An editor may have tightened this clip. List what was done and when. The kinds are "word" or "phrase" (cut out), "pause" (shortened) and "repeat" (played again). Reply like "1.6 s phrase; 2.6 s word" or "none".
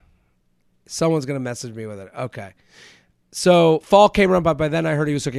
none